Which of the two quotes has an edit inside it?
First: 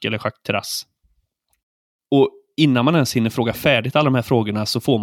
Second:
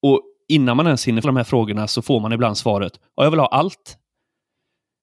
second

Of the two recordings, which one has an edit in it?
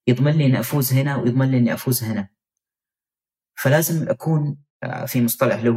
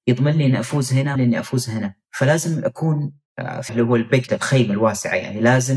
second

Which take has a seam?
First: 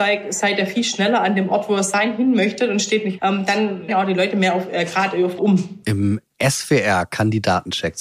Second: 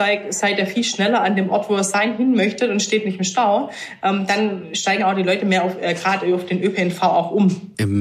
first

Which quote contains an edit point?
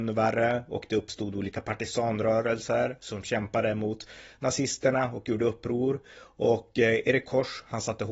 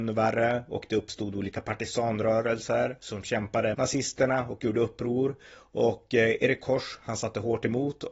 second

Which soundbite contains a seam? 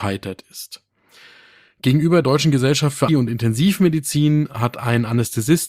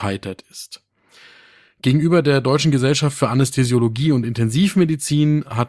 first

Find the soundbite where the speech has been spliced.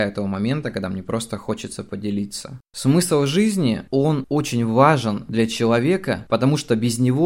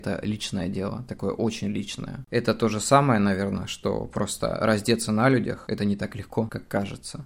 first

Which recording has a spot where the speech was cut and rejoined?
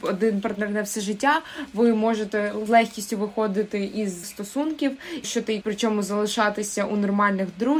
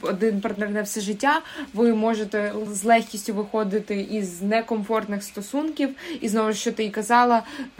first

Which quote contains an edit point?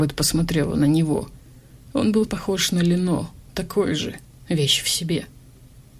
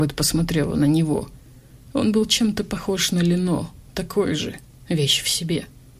first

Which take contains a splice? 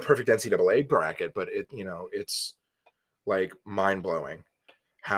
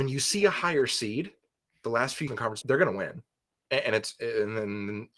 second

